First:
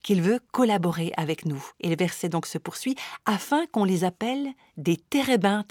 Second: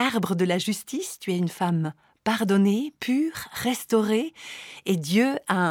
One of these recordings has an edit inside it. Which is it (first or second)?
first